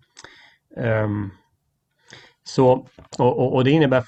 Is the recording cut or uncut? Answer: uncut